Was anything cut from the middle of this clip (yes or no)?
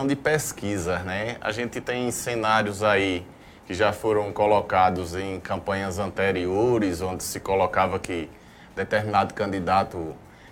no